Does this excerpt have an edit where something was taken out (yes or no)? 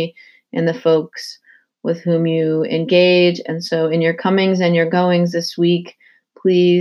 no